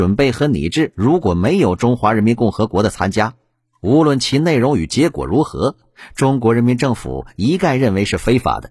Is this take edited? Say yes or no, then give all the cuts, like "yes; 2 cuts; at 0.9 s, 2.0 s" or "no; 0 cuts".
no; 0 cuts